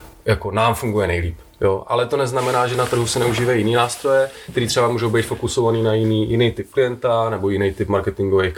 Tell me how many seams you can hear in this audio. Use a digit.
0